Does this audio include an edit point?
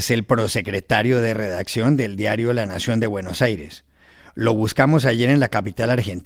no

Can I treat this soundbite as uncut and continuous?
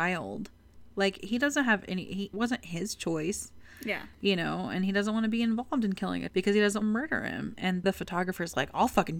no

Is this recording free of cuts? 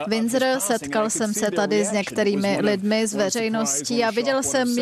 yes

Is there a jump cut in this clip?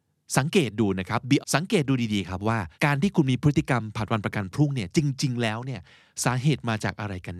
yes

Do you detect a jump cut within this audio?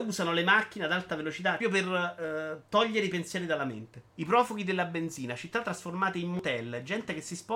yes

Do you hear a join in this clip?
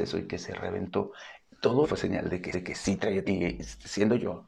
yes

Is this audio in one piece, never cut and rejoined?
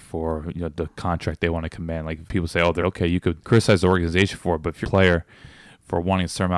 no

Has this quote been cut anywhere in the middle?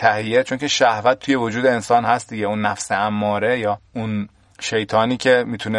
no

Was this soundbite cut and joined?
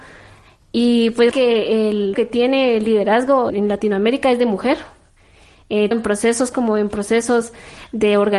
yes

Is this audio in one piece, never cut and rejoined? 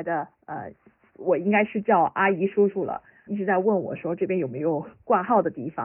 no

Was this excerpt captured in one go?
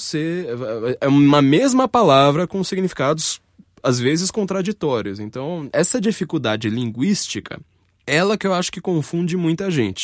yes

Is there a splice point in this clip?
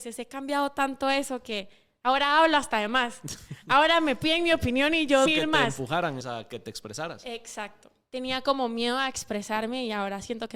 yes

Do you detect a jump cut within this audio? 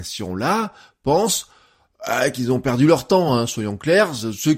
no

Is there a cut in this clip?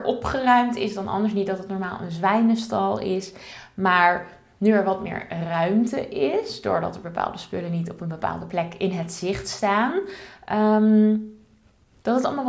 no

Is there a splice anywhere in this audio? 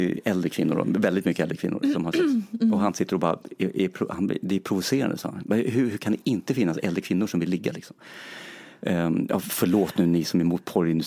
no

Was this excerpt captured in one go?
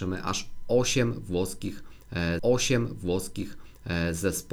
no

